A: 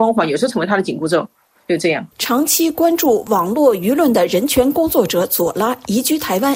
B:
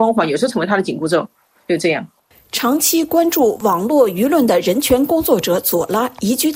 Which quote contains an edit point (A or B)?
A